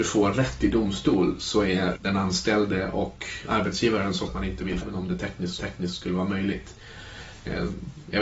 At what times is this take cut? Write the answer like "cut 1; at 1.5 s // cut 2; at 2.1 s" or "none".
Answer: cut 1; at 2.0 s // cut 2; at 4.3 s // cut 3; at 4.8 s // cut 4; at 5.6 s